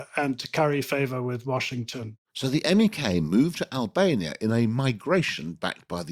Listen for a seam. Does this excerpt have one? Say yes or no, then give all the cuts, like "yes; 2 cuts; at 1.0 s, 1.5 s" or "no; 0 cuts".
yes; 1 cut; at 2.2 s